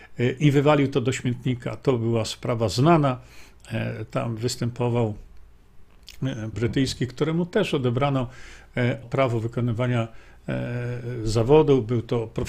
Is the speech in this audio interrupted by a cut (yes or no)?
yes